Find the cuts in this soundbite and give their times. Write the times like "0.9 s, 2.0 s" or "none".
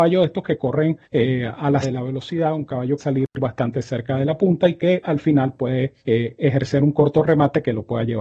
1.0 s, 1.8 s, 3.0 s, 6.0 s